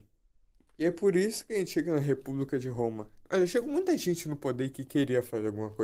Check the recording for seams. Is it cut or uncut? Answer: cut